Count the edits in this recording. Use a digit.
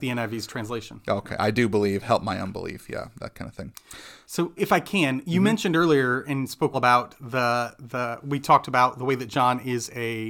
2